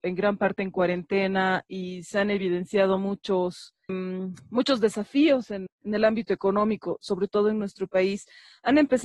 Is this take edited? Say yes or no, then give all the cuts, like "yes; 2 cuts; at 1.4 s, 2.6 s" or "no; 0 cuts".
yes; 2 cuts; at 3.9 s, 5.7 s